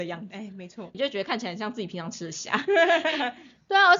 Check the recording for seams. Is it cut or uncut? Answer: cut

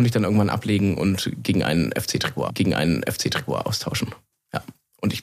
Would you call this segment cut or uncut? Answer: cut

